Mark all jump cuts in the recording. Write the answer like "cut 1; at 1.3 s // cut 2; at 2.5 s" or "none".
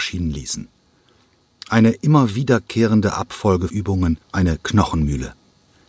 cut 1; at 3.7 s // cut 2; at 4.2 s